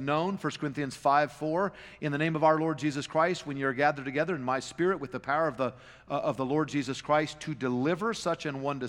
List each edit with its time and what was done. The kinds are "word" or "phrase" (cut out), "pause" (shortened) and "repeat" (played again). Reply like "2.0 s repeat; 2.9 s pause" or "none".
none